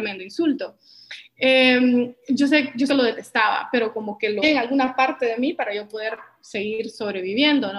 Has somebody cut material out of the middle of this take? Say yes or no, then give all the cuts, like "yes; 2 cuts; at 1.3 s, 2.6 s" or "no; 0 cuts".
yes; 2 cuts; at 2.9 s, 4.4 s